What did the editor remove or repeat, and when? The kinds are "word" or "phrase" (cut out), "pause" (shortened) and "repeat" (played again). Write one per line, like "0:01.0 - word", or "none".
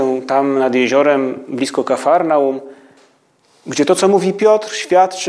none

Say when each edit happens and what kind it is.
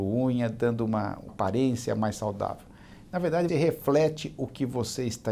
0:01.3 - word
0:03.5 - word

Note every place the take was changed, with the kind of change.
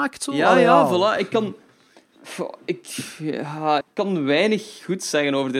0:03.8 - word

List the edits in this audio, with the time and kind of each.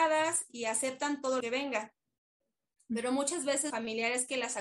0:01.4 - word
0:03.7 - word

